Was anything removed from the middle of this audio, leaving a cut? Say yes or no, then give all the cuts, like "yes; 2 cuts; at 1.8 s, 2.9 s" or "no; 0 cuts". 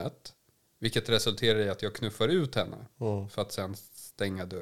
no; 0 cuts